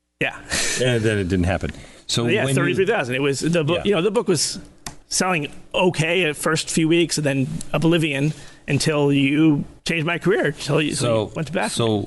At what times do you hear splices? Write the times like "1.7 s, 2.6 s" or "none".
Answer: 5.0 s, 9.8 s

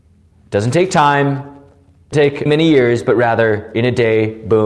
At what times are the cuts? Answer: 2.1 s, 2.5 s

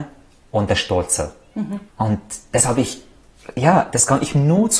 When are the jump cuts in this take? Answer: 1.9 s

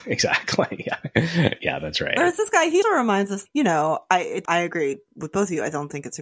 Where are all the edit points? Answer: 2.8 s, 4.4 s

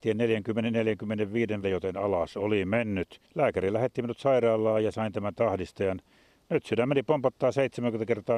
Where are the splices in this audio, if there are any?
1.6 s, 3.3 s, 4.9 s

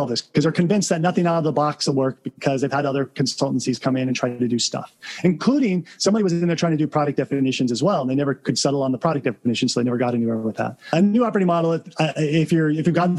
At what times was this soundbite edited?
none

